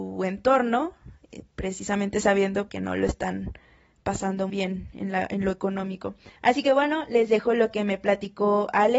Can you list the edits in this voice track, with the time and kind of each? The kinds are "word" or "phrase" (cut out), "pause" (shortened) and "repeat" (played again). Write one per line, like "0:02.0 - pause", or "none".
0:02.7 - phrase
0:04.5 - word
0:06.4 - pause